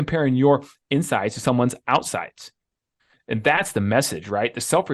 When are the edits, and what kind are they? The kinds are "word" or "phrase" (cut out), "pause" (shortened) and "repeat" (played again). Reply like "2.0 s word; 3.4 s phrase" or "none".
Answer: none